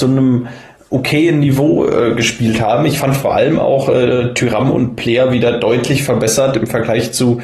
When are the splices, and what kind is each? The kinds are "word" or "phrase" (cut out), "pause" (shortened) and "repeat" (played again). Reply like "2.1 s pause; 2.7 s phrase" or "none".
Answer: none

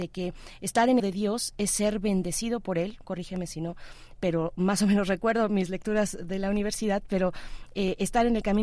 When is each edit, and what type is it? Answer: 1.0 s phrase; 3.0 s phrase

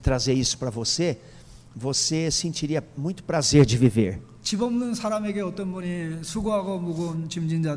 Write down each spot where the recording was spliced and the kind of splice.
none

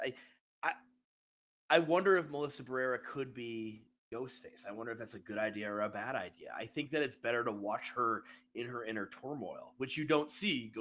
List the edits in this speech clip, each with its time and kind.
none

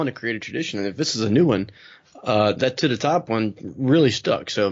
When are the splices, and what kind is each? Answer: none

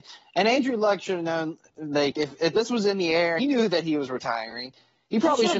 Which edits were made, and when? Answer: 3.4 s phrase

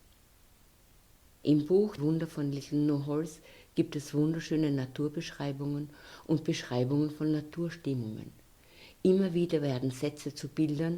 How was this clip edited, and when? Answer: 2.0 s word

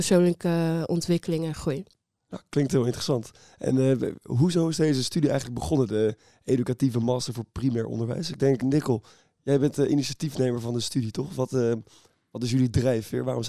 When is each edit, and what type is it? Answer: 8.6 s word

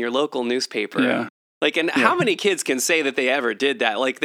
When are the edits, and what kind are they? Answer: none

